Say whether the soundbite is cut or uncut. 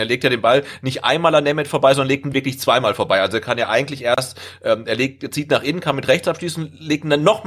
uncut